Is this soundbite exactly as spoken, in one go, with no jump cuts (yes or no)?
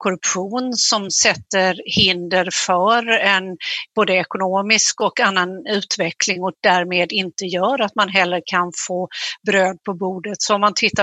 yes